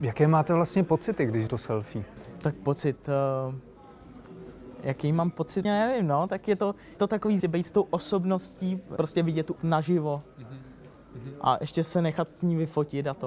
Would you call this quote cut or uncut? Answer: cut